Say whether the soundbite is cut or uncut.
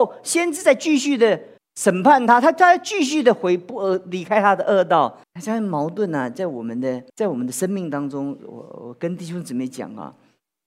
cut